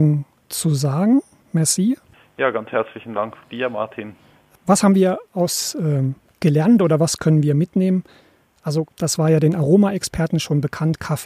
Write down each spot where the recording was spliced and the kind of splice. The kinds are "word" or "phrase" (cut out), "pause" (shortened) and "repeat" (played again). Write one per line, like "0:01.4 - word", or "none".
0:08.9 - pause

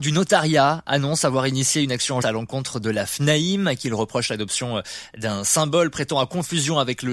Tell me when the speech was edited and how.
0:02.2 - word

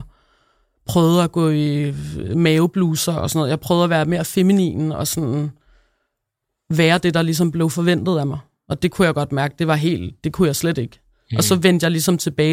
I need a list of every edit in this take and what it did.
none

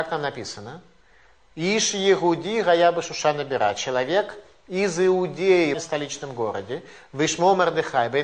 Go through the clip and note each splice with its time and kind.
0:05.7 - phrase

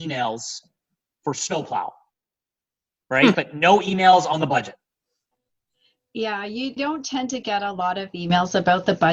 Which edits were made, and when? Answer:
0:06.8 - word

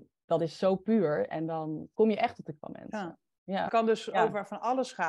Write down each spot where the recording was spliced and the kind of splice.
0:01.9 - word
0:02.6 - word
0:03.7 - word

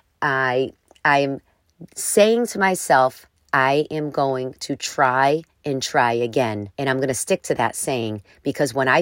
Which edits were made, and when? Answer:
0:03.4 - pause
0:06.7 - pause

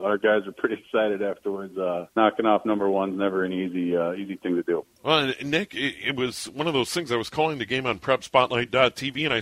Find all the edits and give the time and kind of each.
0:02.1 - pause
0:04.9 - pause

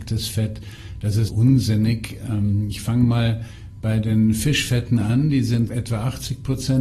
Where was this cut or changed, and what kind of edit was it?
0:01.3 - word
0:05.7 - word

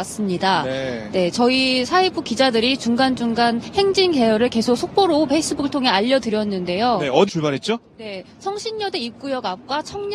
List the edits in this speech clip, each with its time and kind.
0:07.3 - word

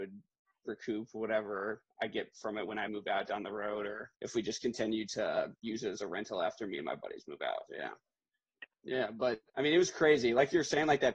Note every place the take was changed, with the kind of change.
0:02.0 - word
0:02.9 - word
0:04.1 - pause
0:05.5 - pause
0:07.7 - word
0:08.7 - pause
0:09.5 - pause

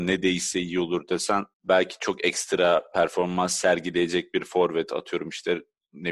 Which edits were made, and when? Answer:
0:01.5 - pause

